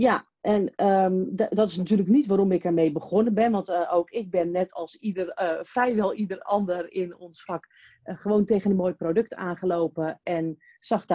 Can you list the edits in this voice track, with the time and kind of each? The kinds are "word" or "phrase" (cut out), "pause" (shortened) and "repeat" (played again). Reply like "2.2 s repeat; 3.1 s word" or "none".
none

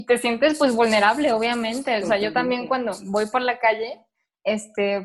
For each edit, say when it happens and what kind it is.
none

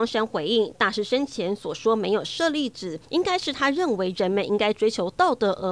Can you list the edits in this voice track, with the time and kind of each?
3.0 s pause

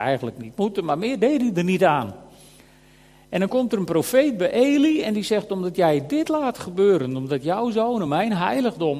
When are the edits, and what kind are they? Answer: none

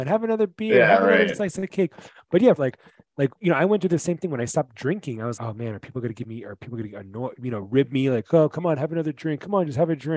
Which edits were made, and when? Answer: 2.6 s phrase; 5.3 s word

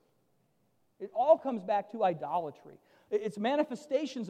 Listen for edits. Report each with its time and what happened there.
none

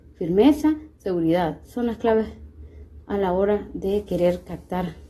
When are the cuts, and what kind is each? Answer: none

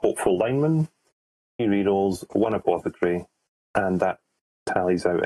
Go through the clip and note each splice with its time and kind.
1.6 s word

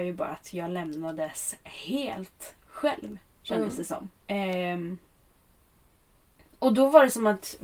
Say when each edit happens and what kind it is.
4.2 s pause

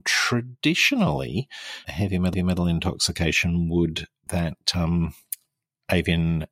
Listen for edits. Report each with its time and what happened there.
1.8 s word; 2.3 s repeat; 4.3 s phrase

